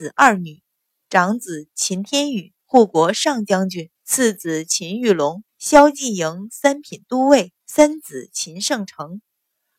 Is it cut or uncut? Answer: cut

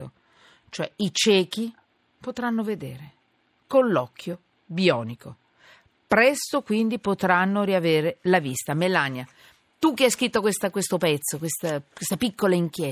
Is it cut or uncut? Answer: uncut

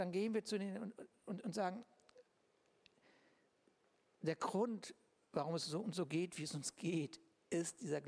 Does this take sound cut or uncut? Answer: uncut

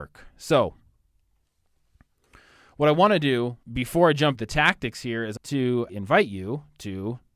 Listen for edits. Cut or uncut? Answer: cut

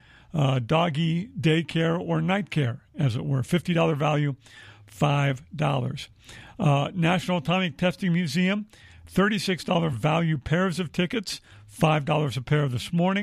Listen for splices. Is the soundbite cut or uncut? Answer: uncut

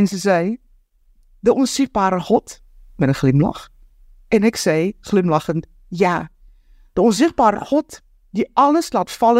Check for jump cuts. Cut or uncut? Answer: uncut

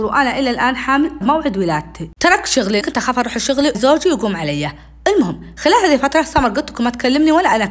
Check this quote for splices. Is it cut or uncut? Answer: cut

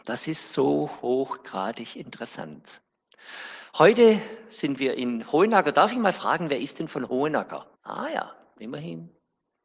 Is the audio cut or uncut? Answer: cut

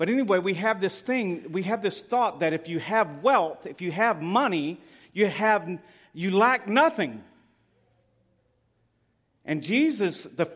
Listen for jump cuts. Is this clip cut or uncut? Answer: uncut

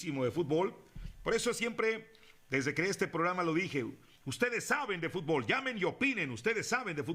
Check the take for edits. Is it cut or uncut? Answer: cut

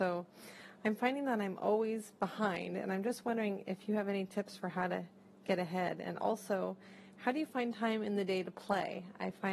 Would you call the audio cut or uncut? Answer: uncut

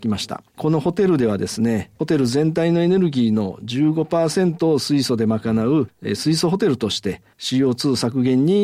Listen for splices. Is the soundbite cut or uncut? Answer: cut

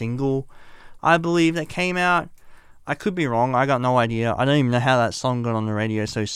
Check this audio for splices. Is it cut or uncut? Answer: uncut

